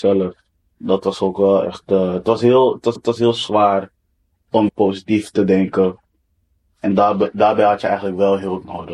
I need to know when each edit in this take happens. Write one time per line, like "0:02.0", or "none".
0:03.0
0:04.7